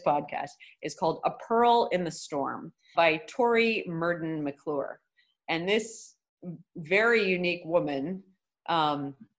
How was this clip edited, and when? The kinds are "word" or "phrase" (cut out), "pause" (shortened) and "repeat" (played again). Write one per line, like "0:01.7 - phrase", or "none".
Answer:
0:02.9 - word